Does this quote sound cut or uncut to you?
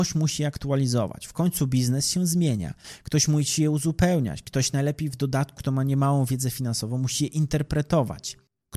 cut